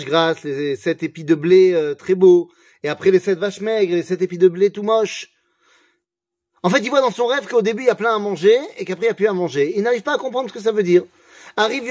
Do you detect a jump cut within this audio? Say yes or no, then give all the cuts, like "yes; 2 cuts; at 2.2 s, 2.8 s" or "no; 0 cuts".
no; 0 cuts